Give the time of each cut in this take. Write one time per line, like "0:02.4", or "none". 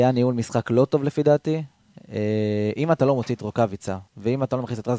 0:04.1